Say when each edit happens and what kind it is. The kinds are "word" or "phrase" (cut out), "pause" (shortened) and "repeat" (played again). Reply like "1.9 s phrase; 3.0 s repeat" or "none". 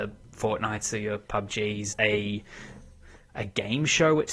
1.9 s phrase